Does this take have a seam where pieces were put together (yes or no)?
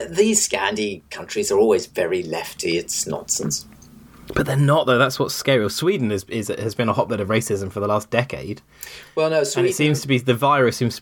no